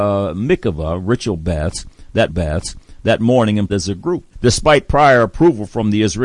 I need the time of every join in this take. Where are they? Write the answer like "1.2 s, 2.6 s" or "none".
2.3 s, 3.7 s, 4.3 s